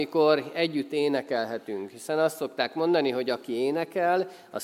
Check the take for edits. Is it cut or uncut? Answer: uncut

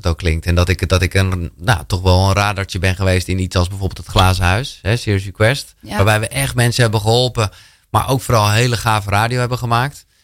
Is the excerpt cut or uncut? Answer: uncut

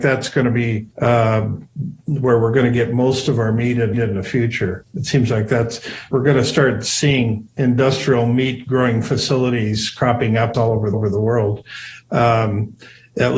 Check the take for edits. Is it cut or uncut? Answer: cut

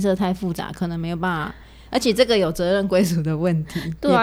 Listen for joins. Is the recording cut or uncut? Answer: uncut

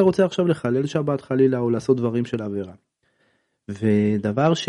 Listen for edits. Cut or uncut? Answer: uncut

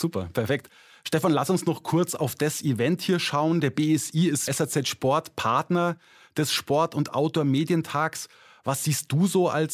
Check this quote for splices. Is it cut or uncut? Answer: cut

